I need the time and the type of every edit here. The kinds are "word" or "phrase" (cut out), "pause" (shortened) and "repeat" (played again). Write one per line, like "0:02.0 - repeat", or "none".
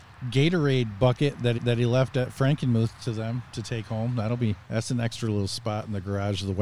0:01.6 - repeat
0:04.6 - pause